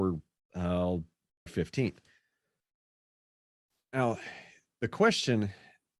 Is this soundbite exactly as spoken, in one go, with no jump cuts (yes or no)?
no